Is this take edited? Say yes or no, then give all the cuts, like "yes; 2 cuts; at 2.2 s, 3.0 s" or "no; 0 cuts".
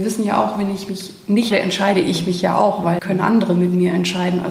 yes; 2 cuts; at 1.5 s, 3.0 s